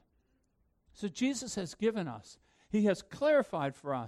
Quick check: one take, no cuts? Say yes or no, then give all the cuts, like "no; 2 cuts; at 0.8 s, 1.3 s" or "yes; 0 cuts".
yes; 0 cuts